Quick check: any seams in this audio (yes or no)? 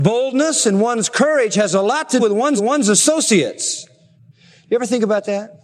yes